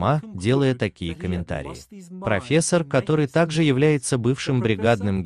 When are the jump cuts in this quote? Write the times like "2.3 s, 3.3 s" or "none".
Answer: none